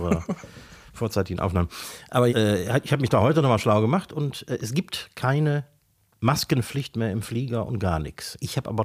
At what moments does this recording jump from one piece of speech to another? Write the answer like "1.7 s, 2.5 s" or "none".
2.3 s